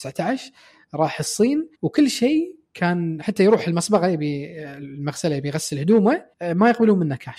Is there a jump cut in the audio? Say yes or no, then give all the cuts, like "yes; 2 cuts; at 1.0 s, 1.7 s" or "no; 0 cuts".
yes; 2 cuts; at 1.7 s, 6.3 s